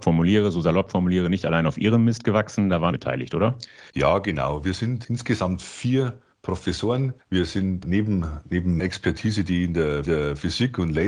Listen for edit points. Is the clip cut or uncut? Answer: cut